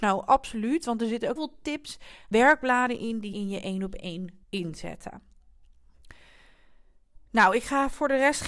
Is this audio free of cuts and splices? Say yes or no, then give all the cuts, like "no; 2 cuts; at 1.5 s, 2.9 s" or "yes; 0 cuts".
no; 5 cuts; at 1.4 s, 2.3 s, 3.3 s, 4.4 s, 7.3 s